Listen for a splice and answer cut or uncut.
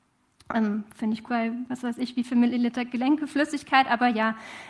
cut